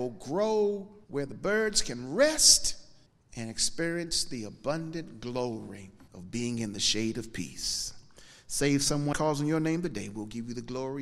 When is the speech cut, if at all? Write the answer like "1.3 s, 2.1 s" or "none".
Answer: 1.0 s, 3.1 s, 6.1 s, 9.1 s

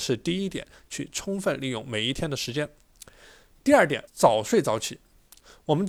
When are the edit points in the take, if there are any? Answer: 4.1 s

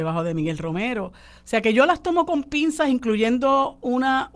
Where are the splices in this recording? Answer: none

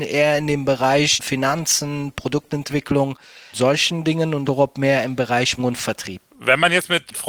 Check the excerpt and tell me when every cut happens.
3.5 s, 4.5 s, 5.6 s, 6.3 s

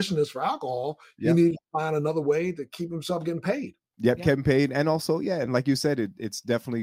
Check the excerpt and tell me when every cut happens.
none

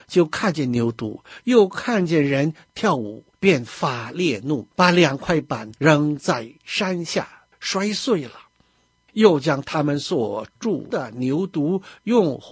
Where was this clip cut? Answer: 3.3 s, 4.7 s, 5.8 s, 7.5 s

